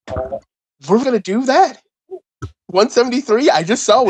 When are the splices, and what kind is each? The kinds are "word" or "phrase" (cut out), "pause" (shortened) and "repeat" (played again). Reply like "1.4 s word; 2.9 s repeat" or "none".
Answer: 1.0 s word